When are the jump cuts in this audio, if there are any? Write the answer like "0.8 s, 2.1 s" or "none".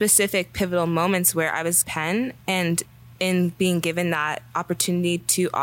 1.8 s

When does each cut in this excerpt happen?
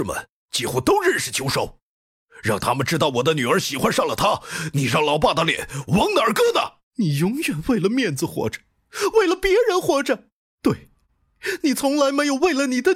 6.8 s, 10.4 s

